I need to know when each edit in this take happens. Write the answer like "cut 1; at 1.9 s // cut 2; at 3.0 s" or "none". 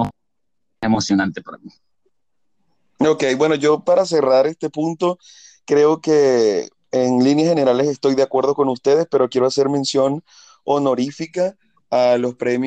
none

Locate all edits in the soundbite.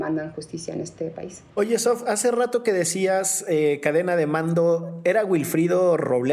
cut 1; at 1.5 s

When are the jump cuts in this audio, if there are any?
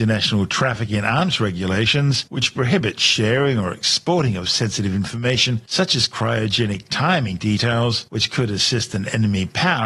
none

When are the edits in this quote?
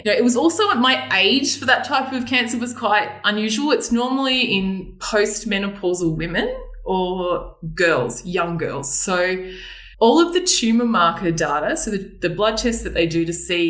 cut 1; at 9.9 s

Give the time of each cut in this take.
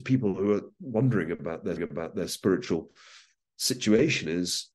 cut 1; at 1.8 s

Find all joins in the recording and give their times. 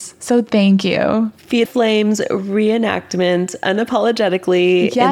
cut 1; at 1.6 s

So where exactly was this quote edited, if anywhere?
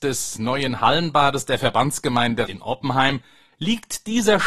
cut 1; at 2.5 s

